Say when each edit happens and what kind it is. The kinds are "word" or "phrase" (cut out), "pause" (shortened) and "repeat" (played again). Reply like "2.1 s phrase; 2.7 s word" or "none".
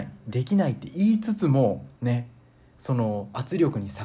2.0 s pause